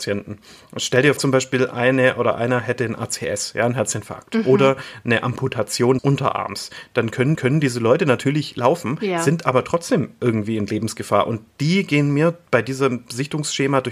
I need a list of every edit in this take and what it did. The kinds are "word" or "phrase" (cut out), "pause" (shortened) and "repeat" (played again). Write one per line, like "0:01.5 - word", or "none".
0:01.2 - word
0:06.0 - word
0:07.3 - repeat